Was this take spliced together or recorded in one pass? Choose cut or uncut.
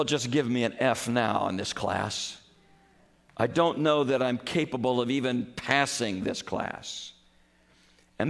uncut